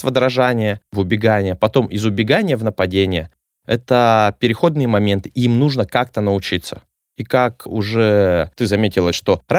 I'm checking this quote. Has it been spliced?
no; 0 cuts

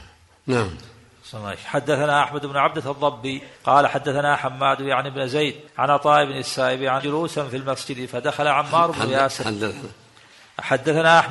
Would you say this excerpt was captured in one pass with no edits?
no; 3 cuts; at 3.5 s, 5.7 s, 7.0 s

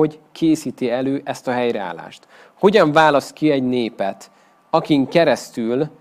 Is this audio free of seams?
yes; 0 cuts

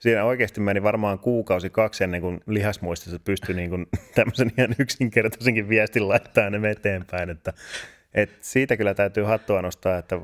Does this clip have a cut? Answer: no; 0 cuts

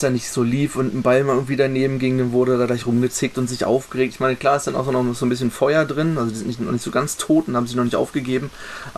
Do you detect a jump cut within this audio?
no; 0 cuts

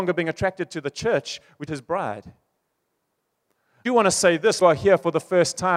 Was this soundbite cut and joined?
yes; 3 cuts; at 1.7 s, 3.9 s, 4.6 s

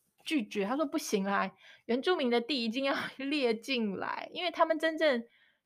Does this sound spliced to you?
no; 0 cuts

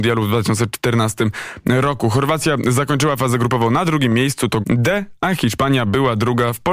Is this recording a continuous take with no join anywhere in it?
no; 1 cut; at 4.6 s

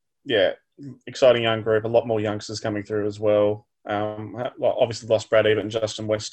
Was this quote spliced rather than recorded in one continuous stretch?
no; 0 cuts

